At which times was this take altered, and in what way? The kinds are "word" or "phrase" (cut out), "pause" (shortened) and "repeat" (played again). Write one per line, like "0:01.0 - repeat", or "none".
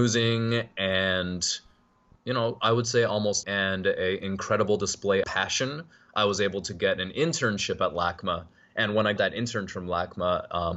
0:02.1 - word
0:03.4 - word
0:05.2 - word
0:09.2 - word